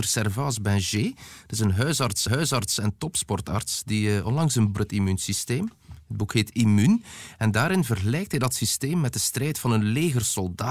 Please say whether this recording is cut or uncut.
cut